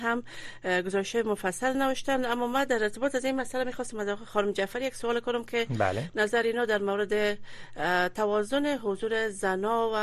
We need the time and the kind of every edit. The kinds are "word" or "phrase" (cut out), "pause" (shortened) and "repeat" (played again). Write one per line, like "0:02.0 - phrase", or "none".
none